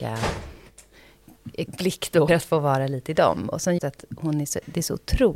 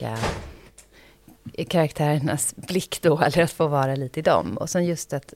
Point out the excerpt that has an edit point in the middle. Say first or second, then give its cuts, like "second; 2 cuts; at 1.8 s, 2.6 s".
first; 3 cuts; at 1.7 s, 2.3 s, 3.8 s